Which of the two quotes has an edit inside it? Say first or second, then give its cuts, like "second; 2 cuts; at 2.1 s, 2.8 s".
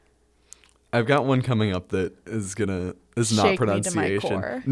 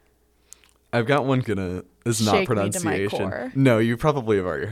second; 1 cut; at 1.4 s